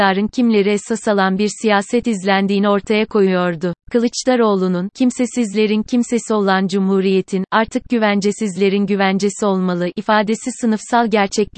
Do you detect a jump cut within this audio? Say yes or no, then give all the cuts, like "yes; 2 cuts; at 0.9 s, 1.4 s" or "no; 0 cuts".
yes; 1 cut; at 3.8 s